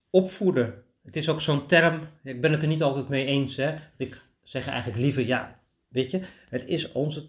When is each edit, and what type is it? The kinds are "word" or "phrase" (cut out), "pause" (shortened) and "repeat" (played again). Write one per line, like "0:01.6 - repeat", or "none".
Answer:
none